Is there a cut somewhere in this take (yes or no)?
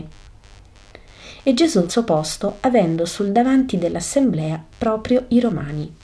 yes